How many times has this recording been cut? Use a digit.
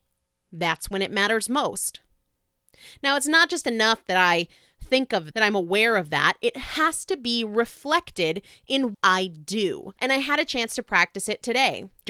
3